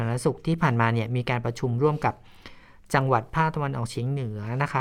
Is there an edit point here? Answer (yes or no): no